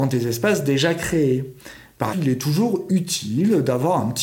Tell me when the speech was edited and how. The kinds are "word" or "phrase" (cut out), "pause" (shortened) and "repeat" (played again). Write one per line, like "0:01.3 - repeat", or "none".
0:02.1 - word